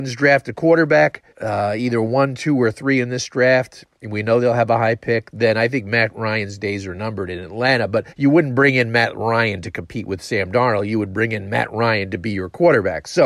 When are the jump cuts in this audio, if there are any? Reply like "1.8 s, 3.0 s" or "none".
1.3 s, 8.1 s